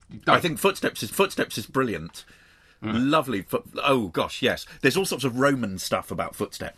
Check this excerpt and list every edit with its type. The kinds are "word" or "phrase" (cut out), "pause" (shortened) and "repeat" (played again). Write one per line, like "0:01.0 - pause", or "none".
0:01.1 - repeat